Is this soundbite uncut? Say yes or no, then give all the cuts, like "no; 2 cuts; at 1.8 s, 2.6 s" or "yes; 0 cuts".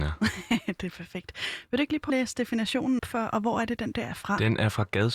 no; 3 cuts; at 2.1 s, 3.0 s, 3.9 s